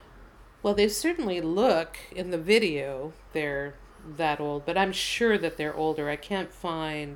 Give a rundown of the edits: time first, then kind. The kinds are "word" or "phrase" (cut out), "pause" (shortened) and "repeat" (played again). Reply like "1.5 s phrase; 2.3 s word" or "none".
3.3 s word